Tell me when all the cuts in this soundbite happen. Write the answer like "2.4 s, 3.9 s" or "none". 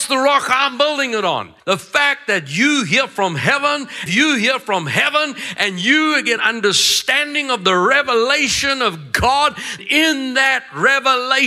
1.6 s, 4.1 s, 6.4 s, 9.8 s